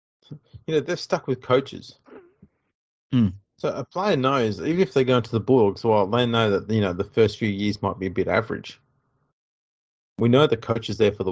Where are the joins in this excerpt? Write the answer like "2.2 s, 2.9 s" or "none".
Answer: none